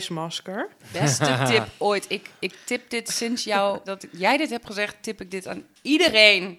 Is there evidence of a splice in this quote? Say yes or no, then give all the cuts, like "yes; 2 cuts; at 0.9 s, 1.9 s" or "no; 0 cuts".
yes; 1 cut; at 3.9 s